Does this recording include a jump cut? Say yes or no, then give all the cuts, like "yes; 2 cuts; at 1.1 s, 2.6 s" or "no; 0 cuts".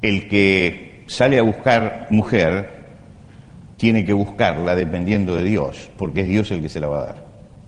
no; 0 cuts